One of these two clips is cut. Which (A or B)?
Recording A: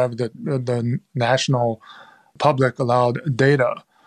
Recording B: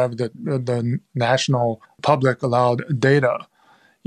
B